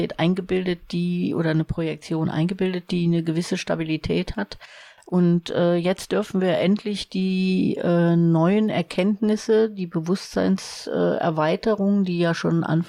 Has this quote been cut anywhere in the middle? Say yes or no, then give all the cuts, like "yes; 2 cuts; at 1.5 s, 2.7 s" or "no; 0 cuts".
no; 0 cuts